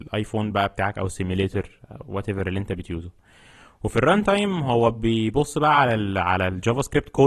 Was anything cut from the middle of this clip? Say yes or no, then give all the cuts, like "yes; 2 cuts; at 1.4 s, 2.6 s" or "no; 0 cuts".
no; 0 cuts